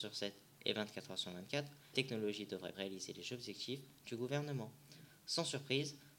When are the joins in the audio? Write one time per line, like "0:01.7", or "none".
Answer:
0:01.9
0:02.7